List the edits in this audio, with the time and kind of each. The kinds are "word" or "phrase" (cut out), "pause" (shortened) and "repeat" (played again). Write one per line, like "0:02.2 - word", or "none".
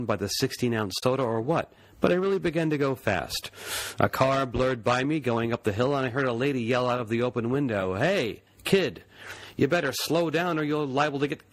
none